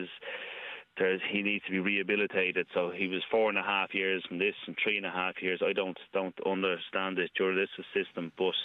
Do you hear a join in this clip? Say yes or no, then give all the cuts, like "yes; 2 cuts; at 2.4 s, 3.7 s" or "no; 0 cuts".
no; 0 cuts